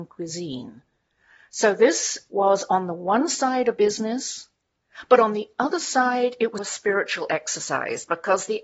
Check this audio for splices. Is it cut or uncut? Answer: cut